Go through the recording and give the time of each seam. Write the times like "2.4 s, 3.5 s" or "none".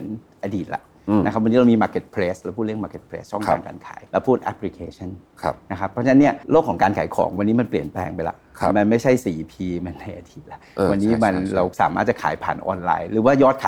4.1 s, 6.4 s